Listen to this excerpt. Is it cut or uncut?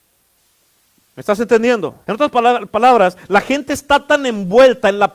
cut